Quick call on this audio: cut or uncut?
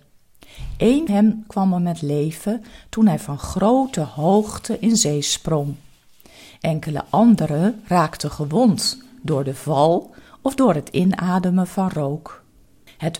cut